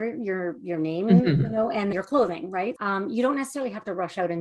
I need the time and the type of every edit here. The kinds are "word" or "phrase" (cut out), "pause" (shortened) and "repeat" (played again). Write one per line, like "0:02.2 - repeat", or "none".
0:01.9 - word
0:02.8 - word